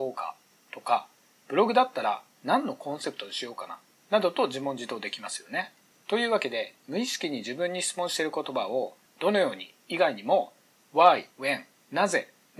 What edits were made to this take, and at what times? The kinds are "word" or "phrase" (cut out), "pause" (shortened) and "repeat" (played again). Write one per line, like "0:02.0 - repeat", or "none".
0:09.1 - word
0:11.3 - word